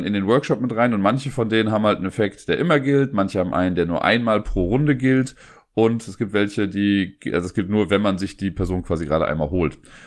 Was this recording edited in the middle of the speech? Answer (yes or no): no